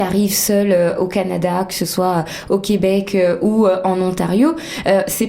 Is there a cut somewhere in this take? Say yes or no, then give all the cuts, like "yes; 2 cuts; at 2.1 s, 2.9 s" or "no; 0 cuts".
no; 0 cuts